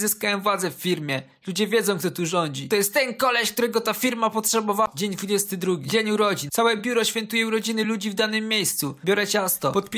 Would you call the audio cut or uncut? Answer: uncut